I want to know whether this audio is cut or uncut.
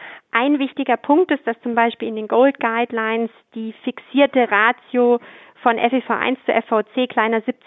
uncut